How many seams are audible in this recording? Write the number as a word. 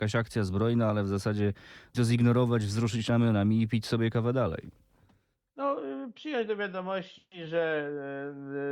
one